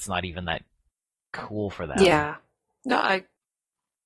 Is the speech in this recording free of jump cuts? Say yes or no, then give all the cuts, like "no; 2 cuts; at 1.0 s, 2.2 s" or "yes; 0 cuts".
yes; 0 cuts